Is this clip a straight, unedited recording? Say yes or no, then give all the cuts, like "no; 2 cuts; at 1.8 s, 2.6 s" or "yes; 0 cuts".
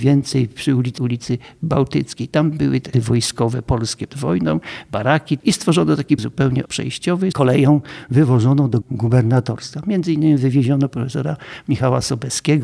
no; 8 cuts; at 1.0 s, 2.9 s, 4.1 s, 5.4 s, 6.2 s, 6.7 s, 7.3 s, 8.8 s